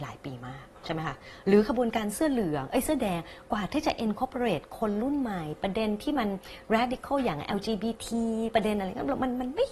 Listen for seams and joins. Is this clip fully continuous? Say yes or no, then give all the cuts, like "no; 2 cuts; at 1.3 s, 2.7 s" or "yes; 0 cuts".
yes; 0 cuts